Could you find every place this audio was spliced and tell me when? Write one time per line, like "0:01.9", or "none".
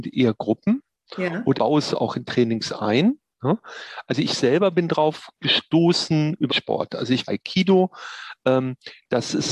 0:01.6
0:06.5
0:07.3